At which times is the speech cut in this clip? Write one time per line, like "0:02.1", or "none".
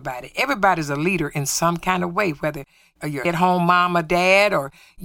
0:03.2